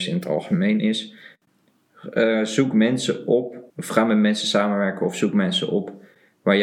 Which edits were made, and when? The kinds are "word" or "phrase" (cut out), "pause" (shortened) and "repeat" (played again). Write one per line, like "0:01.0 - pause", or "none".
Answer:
0:03.7 - pause